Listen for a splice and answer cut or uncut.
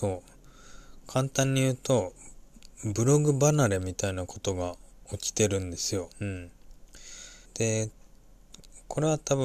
cut